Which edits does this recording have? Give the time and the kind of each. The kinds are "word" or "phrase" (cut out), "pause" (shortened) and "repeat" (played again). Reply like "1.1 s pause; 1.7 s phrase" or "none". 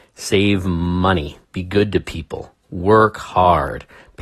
1.4 s pause; 2.6 s pause